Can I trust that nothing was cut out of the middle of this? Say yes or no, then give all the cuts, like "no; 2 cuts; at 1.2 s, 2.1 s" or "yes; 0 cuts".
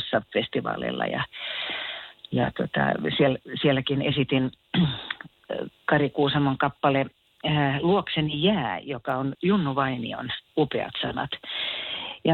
no; 2 cuts; at 9.3 s, 10.5 s